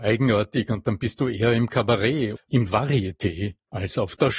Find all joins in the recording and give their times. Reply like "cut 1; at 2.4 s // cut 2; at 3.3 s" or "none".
cut 1; at 2.4 s

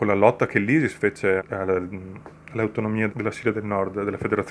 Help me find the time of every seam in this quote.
cut 1; at 1.4 s // cut 2; at 3.1 s

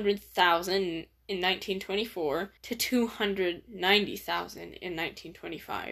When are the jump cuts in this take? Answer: cut 1; at 2.6 s

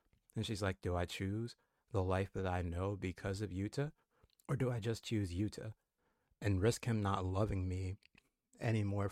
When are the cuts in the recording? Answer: none

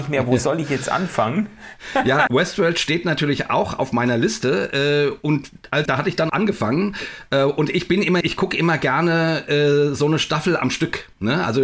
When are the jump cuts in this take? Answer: cut 1; at 2.3 s // cut 2; at 5.9 s // cut 3; at 6.3 s // cut 4; at 8.2 s

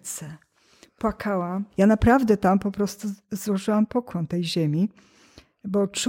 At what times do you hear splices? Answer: cut 1; at 1.7 s // cut 2; at 4.3 s

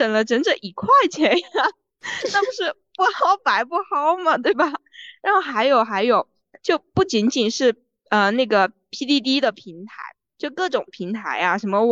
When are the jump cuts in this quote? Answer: none

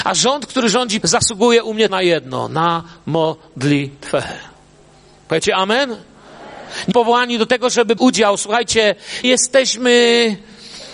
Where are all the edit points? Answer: cut 1; at 1.0 s // cut 2; at 1.9 s // cut 3; at 6.9 s // cut 4; at 8.0 s // cut 5; at 9.2 s

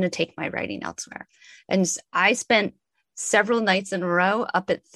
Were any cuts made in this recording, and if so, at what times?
none

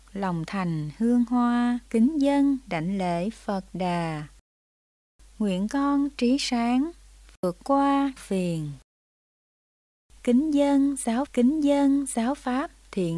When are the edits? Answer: cut 1; at 1.9 s // cut 2; at 8.2 s // cut 3; at 11.3 s

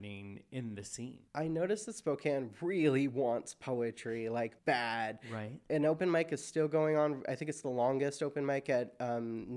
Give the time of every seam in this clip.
cut 1; at 1.3 s // cut 2; at 4.6 s

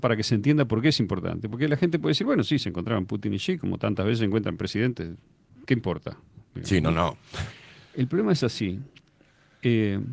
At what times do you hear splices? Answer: none

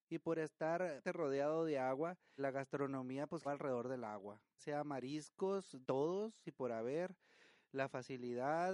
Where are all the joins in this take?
cut 1; at 1.0 s // cut 2; at 2.4 s // cut 3; at 3.4 s // cut 4; at 4.6 s // cut 5; at 5.8 s // cut 6; at 6.4 s

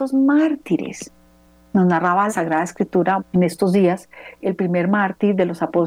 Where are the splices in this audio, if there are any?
cut 1; at 2.3 s // cut 2; at 3.2 s // cut 3; at 4.4 s

